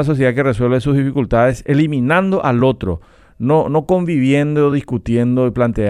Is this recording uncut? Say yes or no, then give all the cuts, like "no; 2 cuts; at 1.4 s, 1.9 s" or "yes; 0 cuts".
yes; 0 cuts